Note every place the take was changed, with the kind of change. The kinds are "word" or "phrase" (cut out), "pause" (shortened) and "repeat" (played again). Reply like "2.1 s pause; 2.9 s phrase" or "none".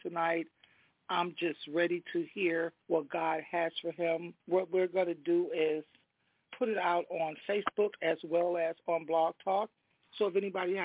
2.8 s pause; 4.4 s pause; 6.5 s word